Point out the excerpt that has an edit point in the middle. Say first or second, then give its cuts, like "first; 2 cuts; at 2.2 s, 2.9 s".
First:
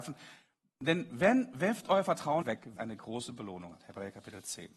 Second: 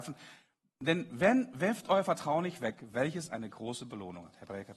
first; 2 cuts; at 2.4 s, 2.8 s